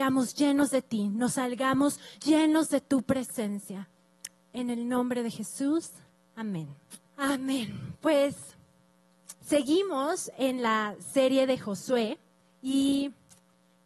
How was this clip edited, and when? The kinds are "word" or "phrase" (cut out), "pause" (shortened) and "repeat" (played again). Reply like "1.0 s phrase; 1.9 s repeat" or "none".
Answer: 2.1 s pause; 7.0 s pause; 9.4 s pause